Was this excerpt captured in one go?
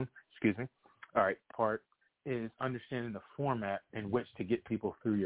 no; 1 cut; at 1.5 s

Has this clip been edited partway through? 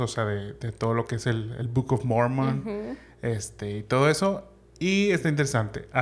no; 0 cuts

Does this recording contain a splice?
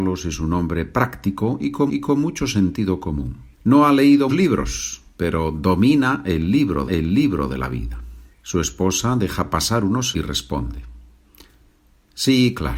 yes; 6 cuts; at 1.9 s, 3.5 s, 4.3 s, 6.9 s, 8.3 s, 10.1 s

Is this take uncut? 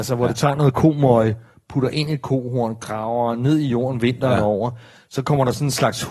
yes; 0 cuts

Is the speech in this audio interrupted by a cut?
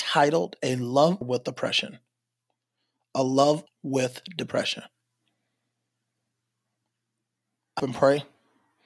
yes; 3 cuts; at 1.2 s, 3.7 s, 7.8 s

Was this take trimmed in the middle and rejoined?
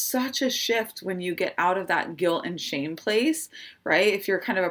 no; 0 cuts

